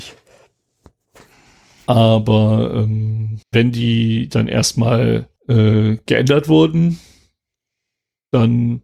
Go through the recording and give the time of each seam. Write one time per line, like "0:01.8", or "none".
0:03.4
0:05.4